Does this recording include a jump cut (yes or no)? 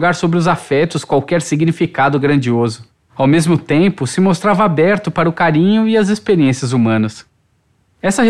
no